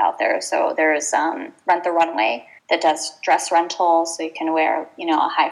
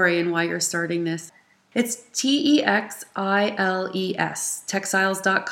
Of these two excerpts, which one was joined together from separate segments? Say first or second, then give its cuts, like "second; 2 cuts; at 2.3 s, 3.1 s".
first; 1 cut; at 2.6 s